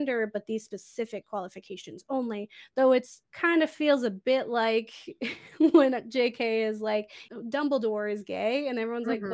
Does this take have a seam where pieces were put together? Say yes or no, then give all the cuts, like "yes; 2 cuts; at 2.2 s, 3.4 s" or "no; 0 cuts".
yes; 1 cut; at 3.2 s